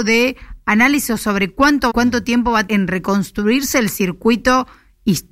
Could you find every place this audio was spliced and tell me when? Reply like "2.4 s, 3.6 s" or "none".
1.9 s, 2.7 s